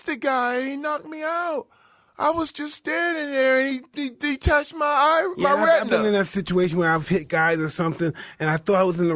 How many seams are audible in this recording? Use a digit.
0